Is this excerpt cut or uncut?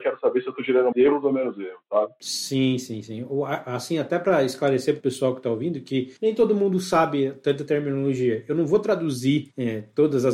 cut